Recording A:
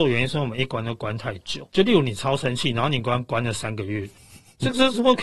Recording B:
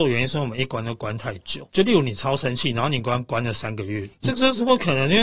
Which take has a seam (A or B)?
B